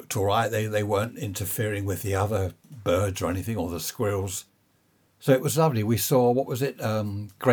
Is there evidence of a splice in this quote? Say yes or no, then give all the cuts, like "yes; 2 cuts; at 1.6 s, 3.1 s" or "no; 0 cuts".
no; 0 cuts